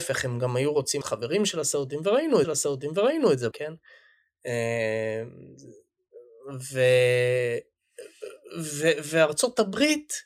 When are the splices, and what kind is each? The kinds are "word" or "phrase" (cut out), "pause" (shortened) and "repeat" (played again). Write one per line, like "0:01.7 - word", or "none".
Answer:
0:01.0 - word
0:02.4 - repeat
0:03.5 - word